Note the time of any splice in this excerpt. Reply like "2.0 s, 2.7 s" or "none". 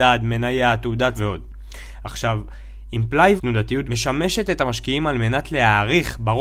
1.2 s, 3.4 s, 3.8 s